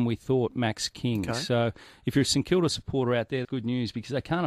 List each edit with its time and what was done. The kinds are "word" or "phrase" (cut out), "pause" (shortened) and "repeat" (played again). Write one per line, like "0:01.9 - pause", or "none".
0:03.4 - word